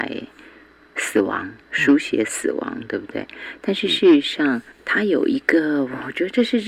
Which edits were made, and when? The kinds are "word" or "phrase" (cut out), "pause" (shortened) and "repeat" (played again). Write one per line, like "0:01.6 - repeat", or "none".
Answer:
0:01.6 - pause
0:04.7 - pause